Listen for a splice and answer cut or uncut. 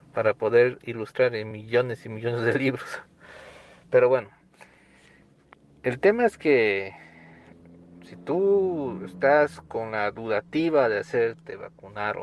uncut